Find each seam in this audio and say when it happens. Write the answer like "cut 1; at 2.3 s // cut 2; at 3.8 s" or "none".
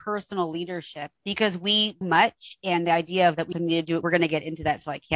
cut 1; at 1.2 s // cut 2; at 2.0 s // cut 3; at 3.5 s // cut 4; at 4.0 s